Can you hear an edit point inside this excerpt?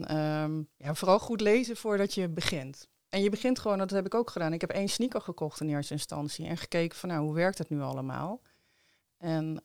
no; 0 cuts

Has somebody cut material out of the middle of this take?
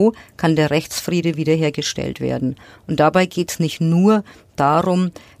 no; 0 cuts

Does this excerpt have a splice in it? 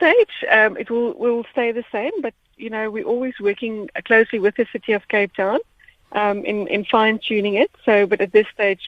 no; 0 cuts

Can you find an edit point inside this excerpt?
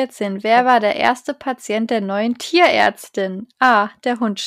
no; 0 cuts

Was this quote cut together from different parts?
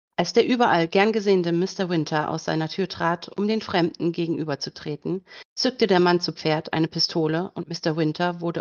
no; 0 cuts

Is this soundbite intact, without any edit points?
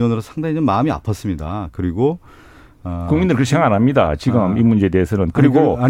yes; 0 cuts

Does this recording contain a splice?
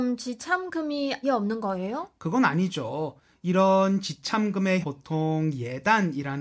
yes; 2 cuts; at 1.2 s, 4.8 s

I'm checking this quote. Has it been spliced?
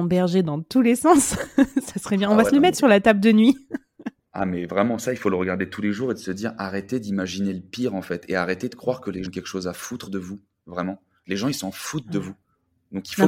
yes; 1 cut; at 9.2 s

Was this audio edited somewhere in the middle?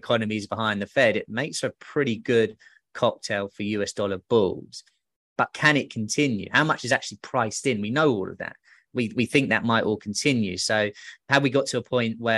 no; 0 cuts

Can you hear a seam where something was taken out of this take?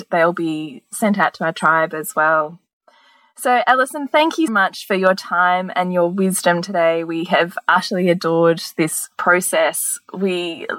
yes; 1 cut; at 4.5 s

